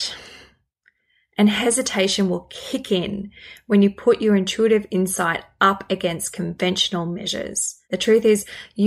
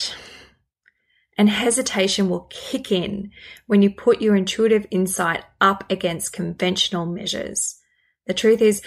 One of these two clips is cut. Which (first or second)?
first